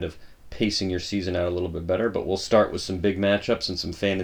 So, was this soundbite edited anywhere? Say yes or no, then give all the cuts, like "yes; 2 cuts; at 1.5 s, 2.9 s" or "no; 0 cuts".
no; 0 cuts